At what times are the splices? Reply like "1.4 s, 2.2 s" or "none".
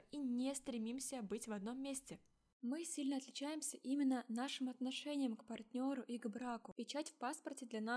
none